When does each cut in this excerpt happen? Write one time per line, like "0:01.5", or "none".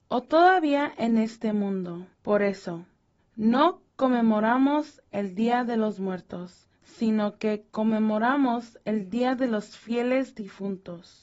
0:02.1
0:03.2
0:06.7